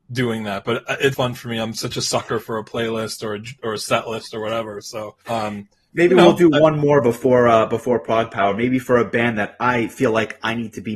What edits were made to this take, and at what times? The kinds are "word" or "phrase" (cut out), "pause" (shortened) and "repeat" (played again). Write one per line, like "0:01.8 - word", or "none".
0:01.1 - word
0:05.2 - pause